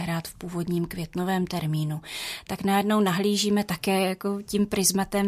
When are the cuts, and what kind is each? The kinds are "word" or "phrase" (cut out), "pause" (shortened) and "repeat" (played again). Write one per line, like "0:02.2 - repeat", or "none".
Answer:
0:02.5 - word